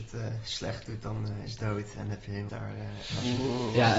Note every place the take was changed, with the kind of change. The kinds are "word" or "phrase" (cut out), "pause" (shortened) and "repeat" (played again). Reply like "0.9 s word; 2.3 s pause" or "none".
1.6 s word; 2.5 s word

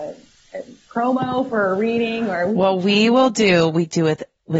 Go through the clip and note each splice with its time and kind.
none

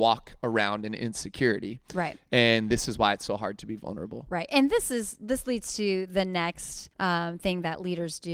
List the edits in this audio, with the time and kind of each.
6.9 s pause

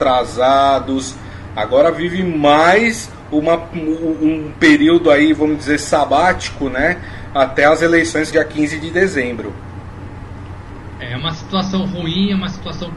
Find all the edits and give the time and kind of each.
8.3 s phrase

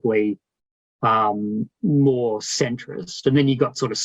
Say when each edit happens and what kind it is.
none

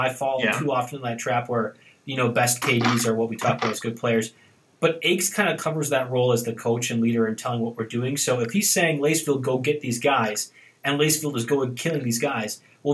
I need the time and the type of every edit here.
none

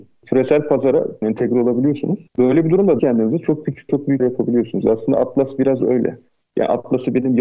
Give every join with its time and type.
1.2 s word; 2.3 s pause; 3.0 s phrase; 3.9 s word; 4.2 s word

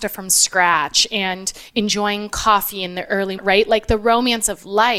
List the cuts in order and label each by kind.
3.4 s phrase

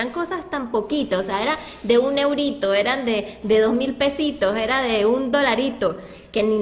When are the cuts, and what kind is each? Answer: none

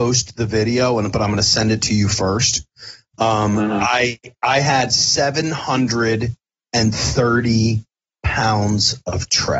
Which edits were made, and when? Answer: none

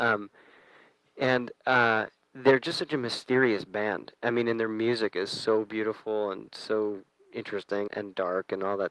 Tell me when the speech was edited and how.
7.9 s word

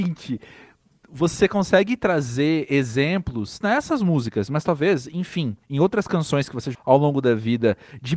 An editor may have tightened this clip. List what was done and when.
3.6 s word; 5.6 s pause; 6.7 s word

